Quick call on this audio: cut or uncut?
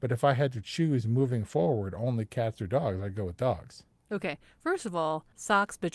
uncut